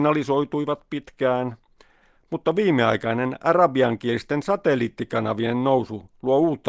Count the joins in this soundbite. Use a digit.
0